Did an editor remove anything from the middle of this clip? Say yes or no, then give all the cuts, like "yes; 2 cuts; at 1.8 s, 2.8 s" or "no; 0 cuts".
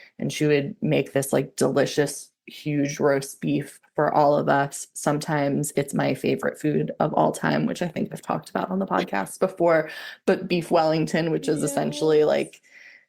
no; 0 cuts